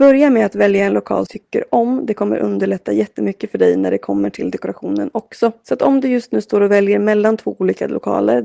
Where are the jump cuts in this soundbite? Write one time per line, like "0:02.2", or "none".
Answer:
0:01.3